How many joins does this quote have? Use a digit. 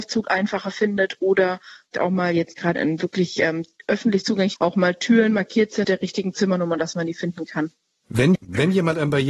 5